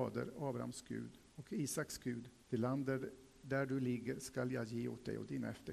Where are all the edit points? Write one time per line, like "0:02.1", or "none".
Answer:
0:01.3
0:02.4